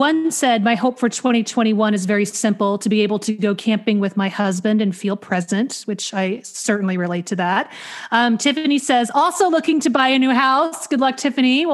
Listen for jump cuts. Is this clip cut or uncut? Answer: uncut